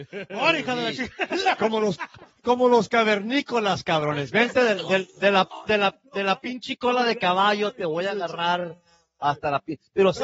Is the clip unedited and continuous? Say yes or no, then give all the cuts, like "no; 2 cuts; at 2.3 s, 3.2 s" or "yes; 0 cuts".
yes; 0 cuts